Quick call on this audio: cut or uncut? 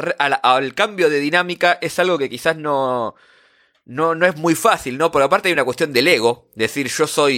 uncut